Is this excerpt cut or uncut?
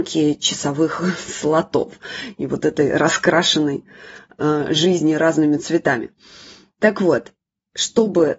uncut